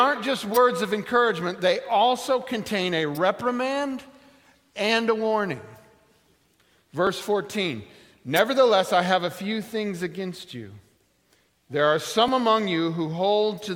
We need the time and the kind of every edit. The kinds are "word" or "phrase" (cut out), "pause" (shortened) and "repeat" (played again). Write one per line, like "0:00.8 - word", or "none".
none